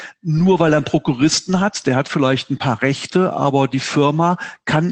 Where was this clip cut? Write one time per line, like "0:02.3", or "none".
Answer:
none